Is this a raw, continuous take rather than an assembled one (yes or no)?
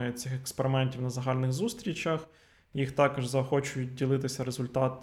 yes